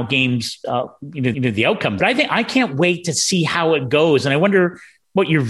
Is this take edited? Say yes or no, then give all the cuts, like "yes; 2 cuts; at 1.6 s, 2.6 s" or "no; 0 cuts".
yes; 2 cuts; at 1.3 s, 2.0 s